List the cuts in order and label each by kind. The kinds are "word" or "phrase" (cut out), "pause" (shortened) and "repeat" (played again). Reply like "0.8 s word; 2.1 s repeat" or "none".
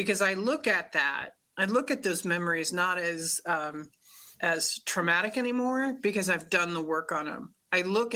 4.3 s pause